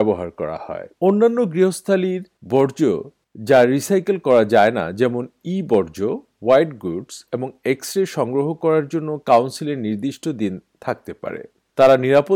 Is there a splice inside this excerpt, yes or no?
yes